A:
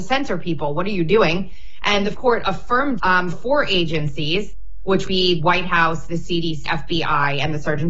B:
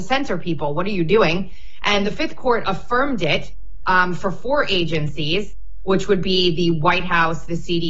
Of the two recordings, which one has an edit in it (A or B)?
A